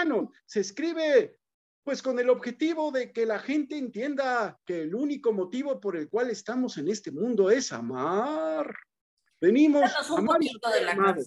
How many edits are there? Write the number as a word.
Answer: zero